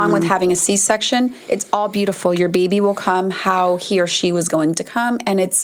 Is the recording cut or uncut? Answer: uncut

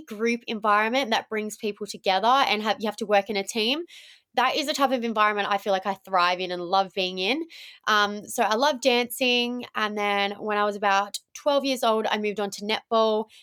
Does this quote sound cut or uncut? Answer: uncut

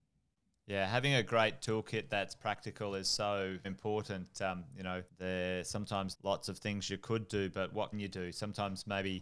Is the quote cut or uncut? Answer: cut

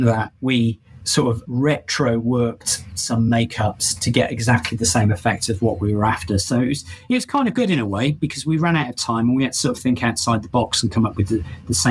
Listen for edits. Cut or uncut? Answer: uncut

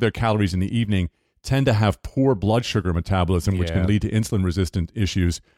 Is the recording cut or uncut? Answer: uncut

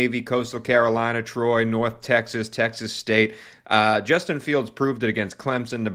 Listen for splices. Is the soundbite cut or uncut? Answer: uncut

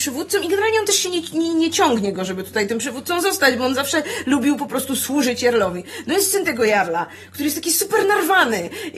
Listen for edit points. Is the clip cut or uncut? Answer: uncut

